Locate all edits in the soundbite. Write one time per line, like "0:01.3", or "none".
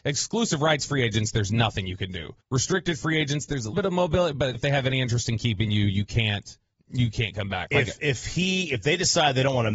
0:02.4
0:03.7
0:04.5
0:06.7